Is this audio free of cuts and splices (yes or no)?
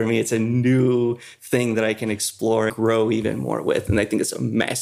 no